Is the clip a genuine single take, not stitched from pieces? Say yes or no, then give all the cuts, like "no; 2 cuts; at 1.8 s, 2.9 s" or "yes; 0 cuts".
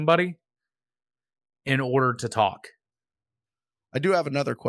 yes; 0 cuts